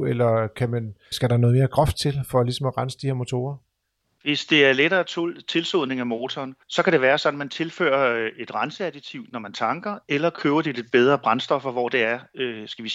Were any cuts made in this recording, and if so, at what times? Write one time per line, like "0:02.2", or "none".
0:01.1
0:03.8
0:06.6